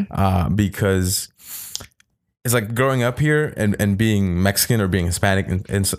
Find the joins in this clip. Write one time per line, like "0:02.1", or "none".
none